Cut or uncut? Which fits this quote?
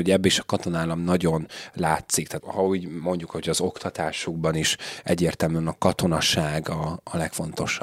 cut